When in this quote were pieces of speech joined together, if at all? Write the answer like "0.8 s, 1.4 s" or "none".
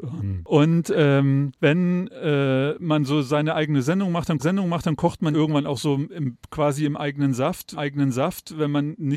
1.6 s, 4.4 s, 5.3 s, 7.8 s